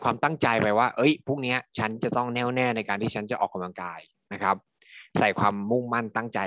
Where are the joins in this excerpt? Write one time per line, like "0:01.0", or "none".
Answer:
none